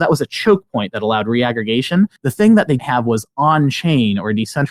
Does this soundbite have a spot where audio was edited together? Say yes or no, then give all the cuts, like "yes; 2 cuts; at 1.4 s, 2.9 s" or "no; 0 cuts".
yes; 2 cuts; at 2.2 s, 2.8 s